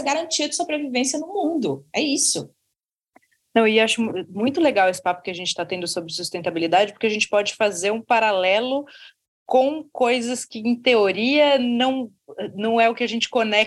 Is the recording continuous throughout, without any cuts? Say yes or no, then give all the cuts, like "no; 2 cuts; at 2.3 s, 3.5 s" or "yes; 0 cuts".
yes; 0 cuts